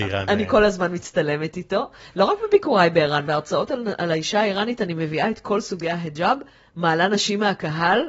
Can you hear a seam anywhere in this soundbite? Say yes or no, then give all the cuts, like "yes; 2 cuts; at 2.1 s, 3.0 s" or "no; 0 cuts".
no; 0 cuts